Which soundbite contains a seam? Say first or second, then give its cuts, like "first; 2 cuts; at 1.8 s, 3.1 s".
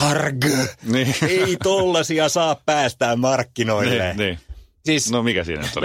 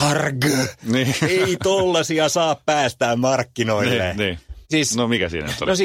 second; 1 cut; at 4.7 s